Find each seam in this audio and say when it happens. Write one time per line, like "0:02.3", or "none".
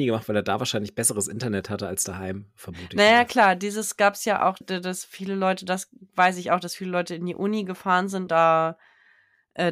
0:04.6
0:08.3